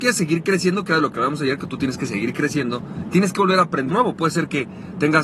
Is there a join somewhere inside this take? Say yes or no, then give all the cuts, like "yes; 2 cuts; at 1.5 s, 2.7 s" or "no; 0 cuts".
yes; 1 cut; at 3.9 s